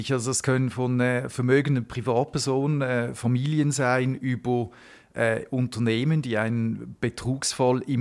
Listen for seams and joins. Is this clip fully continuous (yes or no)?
yes